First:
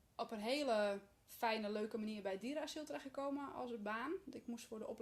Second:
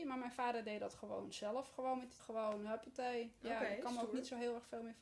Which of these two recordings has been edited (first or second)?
second